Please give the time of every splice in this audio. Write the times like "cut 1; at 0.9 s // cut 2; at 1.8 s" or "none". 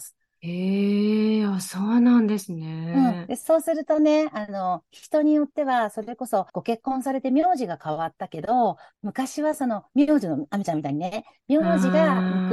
cut 1; at 6.5 s